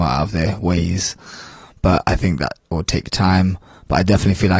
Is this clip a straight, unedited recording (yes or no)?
yes